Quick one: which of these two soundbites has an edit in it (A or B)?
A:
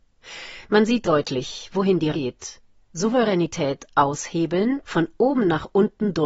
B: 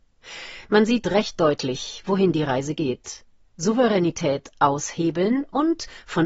A